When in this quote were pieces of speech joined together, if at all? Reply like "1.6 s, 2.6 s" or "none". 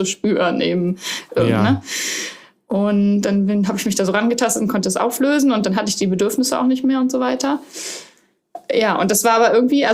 none